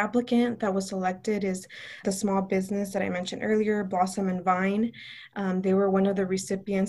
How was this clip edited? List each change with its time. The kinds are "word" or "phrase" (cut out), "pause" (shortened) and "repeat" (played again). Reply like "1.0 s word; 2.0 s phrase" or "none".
2.0 s word